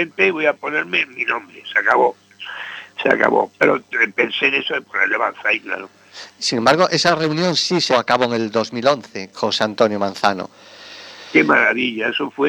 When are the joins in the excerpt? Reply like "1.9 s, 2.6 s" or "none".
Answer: 7.9 s, 9.3 s